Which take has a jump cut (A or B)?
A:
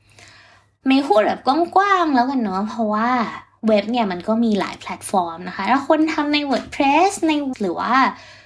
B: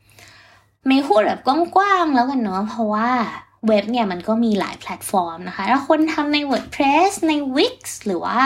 A